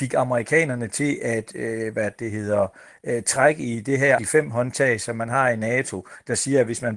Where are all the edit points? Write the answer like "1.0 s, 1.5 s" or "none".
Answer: 4.2 s

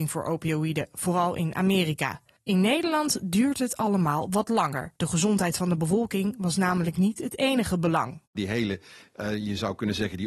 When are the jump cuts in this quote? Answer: 2.4 s, 5.0 s, 8.3 s

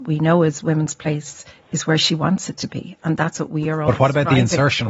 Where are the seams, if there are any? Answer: none

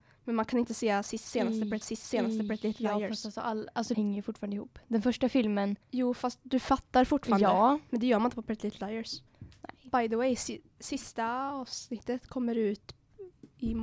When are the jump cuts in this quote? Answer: 1.8 s, 3.9 s, 5.8 s, 9.3 s

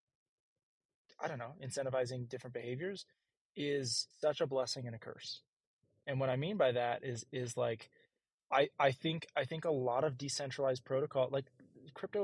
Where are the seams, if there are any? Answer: 4.1 s

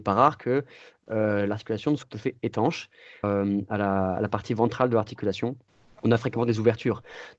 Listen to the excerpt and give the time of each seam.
2.0 s, 3.2 s

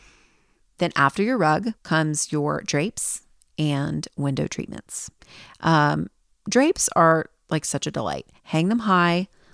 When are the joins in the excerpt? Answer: 1.8 s

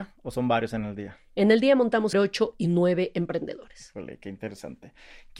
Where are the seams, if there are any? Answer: 2.1 s

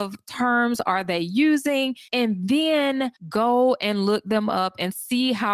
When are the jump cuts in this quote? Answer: 2.1 s, 3.2 s

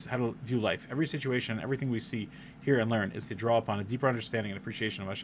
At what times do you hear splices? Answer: 3.2 s

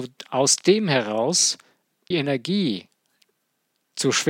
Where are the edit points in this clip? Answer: 2.1 s

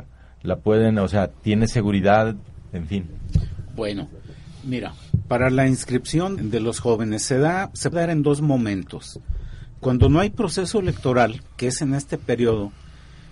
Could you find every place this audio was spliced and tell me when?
6.4 s, 7.9 s

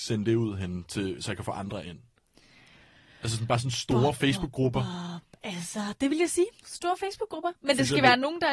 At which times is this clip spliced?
none

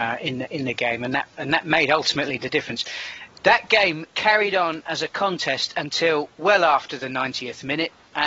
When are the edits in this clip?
none

